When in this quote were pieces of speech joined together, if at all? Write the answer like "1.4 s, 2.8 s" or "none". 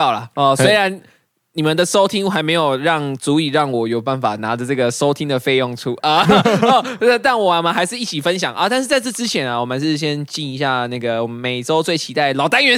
none